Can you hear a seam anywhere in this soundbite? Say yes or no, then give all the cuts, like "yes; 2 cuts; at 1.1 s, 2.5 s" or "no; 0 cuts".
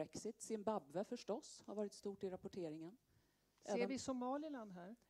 no; 0 cuts